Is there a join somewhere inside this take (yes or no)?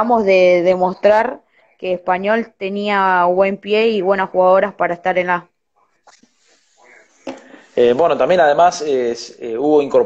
no